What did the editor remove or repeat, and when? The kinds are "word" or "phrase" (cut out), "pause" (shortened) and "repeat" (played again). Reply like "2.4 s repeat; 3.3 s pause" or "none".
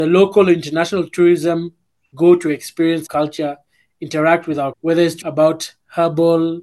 3.1 s word; 4.7 s word; 5.2 s word